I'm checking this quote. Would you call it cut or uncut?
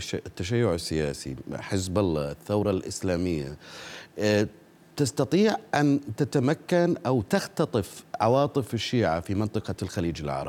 uncut